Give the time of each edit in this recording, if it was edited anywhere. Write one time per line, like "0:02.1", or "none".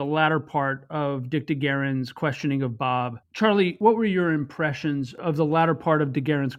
none